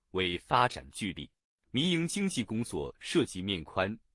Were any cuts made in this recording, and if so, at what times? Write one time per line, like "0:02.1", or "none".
0:01.4